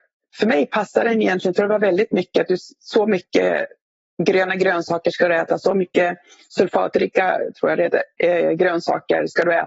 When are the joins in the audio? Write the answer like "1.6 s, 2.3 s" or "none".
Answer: none